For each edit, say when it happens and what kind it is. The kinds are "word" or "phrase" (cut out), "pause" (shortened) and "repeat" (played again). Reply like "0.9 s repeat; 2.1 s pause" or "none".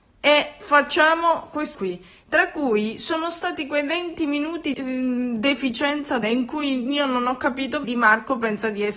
1.7 s word; 4.7 s word; 6.2 s word; 7.8 s word